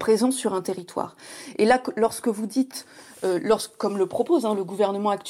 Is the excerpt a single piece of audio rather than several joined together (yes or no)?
yes